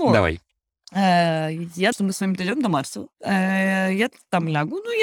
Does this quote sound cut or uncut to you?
cut